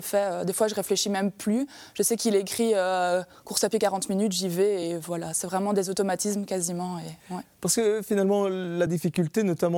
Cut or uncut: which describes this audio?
uncut